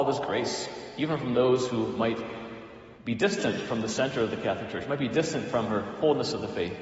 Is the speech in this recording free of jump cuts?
no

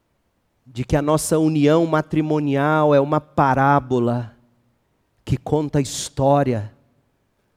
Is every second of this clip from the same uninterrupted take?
yes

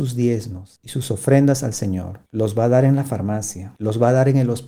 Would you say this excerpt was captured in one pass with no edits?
yes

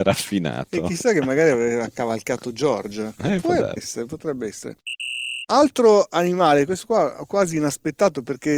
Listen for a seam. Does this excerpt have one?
yes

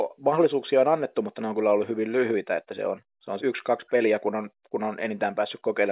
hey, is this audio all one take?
no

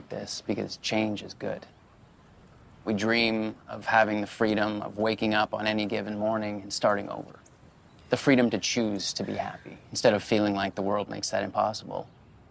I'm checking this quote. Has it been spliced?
no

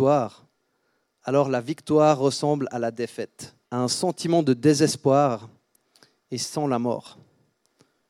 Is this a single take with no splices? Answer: no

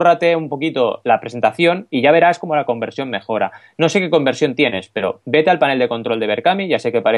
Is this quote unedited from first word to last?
yes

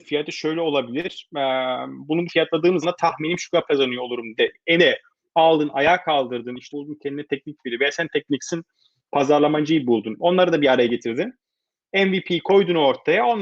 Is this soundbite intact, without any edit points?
no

